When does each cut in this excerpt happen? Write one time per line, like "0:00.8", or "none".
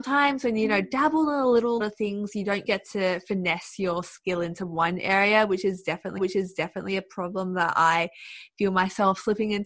0:01.8
0:02.7
0:06.2